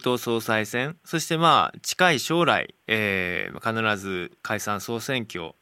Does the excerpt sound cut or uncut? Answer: cut